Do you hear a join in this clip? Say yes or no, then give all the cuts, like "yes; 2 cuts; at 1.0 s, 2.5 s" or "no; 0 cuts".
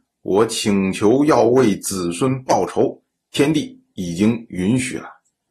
no; 0 cuts